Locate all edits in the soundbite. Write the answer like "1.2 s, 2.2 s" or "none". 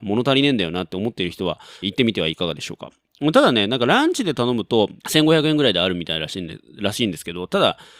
1.8 s, 5.0 s